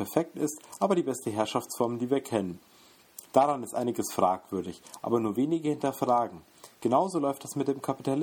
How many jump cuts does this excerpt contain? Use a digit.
1